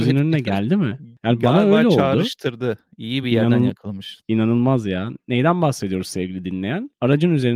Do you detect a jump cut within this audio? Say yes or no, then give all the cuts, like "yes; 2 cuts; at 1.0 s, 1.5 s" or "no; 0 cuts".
no; 0 cuts